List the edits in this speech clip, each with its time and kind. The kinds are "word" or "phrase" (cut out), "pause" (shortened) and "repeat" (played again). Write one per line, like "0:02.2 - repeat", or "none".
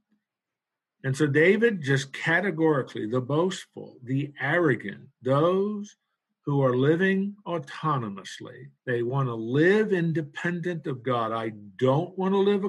0:08.8 - pause

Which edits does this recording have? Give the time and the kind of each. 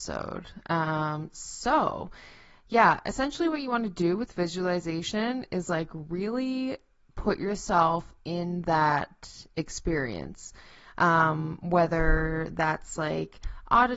none

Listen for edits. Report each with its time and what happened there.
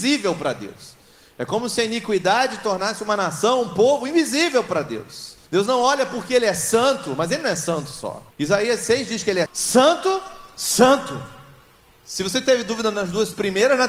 0:05.4 - pause
0:08.3 - pause
0:09.5 - word

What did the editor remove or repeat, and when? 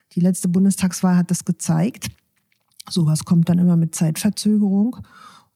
none

